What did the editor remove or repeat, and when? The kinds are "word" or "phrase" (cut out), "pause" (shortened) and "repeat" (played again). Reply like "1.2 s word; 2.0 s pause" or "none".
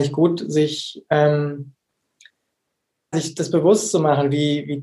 3.1 s word